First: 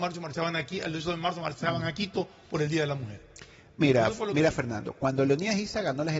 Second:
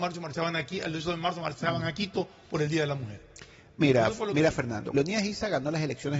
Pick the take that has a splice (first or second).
second